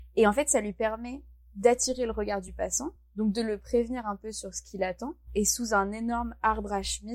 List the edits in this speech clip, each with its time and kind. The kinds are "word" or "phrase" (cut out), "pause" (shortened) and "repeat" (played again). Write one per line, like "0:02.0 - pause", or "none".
none